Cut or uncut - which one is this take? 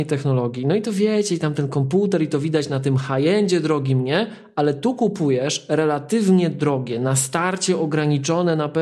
uncut